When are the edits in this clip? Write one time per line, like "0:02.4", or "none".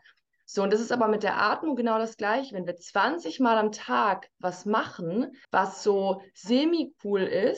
0:05.4